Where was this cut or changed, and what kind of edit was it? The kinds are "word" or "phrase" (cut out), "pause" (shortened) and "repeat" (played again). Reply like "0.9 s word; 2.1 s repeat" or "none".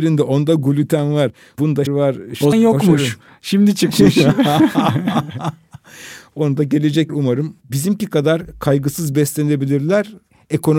1.9 s word; 2.5 s word; 7.1 s word; 7.6 s pause